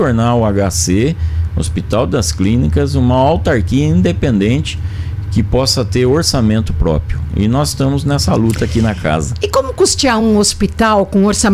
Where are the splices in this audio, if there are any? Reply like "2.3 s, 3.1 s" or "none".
none